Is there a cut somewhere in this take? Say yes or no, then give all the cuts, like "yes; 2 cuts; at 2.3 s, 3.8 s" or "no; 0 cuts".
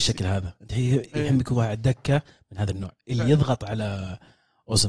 no; 0 cuts